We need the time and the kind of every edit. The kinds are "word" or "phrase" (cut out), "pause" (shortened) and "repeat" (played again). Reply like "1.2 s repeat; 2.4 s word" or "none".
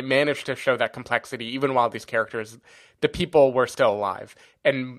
none